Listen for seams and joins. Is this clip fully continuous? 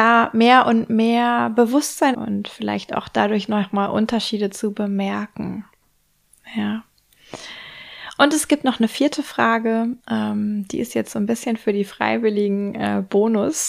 no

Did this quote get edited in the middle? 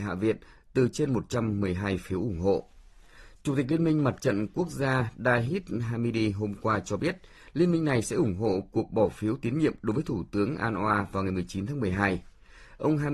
no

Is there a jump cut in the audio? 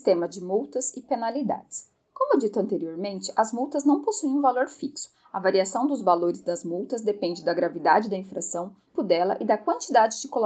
yes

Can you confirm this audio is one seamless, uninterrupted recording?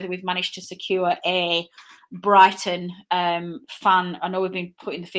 yes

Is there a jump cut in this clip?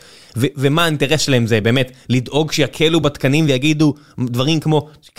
no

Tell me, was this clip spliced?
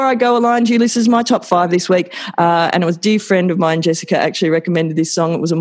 no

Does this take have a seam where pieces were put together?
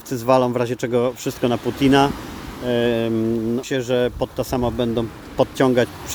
yes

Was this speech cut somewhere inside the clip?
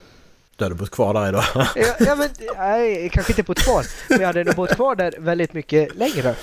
no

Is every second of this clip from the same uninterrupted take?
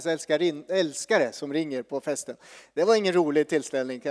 yes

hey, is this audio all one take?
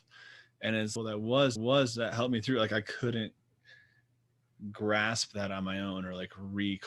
no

